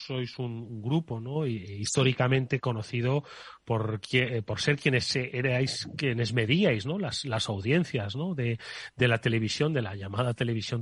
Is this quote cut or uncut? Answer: uncut